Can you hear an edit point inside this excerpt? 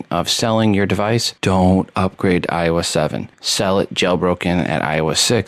yes; 2 cuts; at 1.4 s, 3.3 s

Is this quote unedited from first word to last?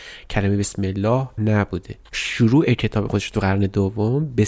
no; 2 cuts; at 1.4 s, 2.1 s

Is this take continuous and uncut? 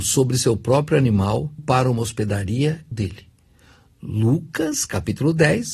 no; 2 cuts; at 1.6 s, 2.9 s

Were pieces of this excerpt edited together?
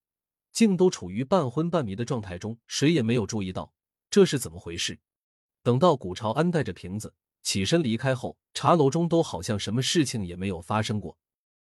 yes; 3 cuts; at 2.6 s, 5.2 s, 8.5 s

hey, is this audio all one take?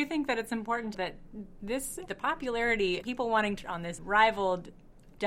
no; 5 cuts; at 0.9 s, 2.1 s, 3.0 s, 3.6 s, 4.0 s

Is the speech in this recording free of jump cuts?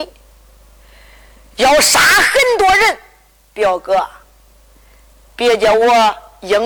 yes; 0 cuts

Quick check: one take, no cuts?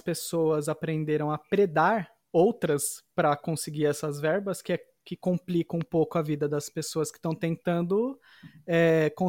yes; 0 cuts

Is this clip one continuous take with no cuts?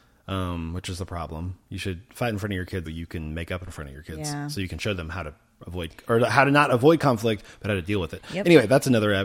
no; 1 cut; at 2.9 s

